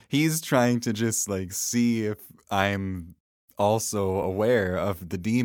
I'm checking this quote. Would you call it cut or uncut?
uncut